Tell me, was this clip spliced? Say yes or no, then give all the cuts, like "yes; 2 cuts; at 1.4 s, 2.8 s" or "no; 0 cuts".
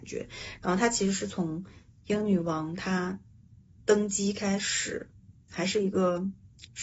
no; 0 cuts